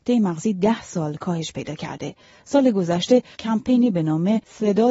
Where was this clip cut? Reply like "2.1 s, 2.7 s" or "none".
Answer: none